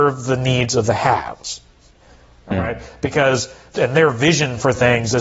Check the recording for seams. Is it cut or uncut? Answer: cut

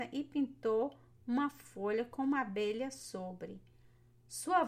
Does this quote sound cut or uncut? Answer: uncut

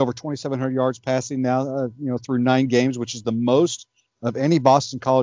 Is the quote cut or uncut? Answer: uncut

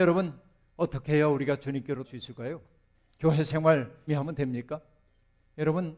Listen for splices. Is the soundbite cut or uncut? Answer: cut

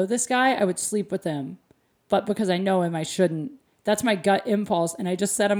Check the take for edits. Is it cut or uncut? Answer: uncut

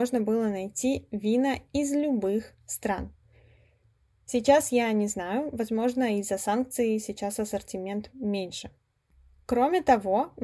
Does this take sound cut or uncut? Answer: uncut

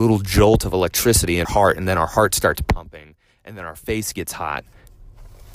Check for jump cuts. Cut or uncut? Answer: cut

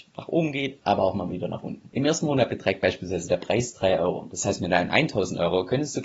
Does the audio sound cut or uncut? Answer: uncut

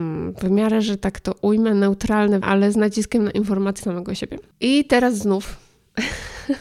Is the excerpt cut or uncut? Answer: cut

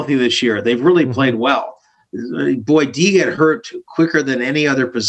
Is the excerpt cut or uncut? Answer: uncut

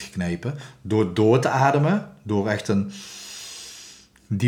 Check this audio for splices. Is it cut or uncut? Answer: uncut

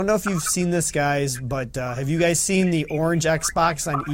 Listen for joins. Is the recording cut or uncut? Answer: uncut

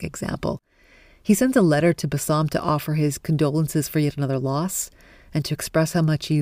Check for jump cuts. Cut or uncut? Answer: uncut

